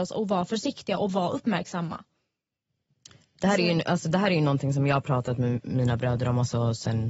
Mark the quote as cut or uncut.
uncut